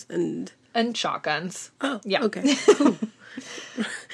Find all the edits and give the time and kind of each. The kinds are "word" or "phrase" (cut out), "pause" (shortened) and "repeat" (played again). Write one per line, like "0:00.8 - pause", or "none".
0:01.7 - pause